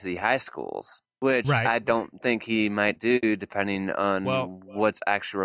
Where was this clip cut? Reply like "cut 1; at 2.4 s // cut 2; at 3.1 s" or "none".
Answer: cut 1; at 1.1 s // cut 2; at 3.0 s